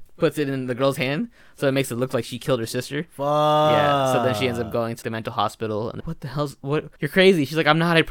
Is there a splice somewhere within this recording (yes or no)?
yes